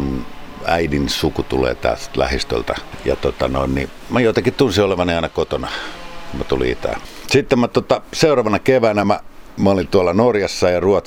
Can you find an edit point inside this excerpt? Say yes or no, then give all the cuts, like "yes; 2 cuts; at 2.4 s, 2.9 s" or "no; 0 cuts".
no; 0 cuts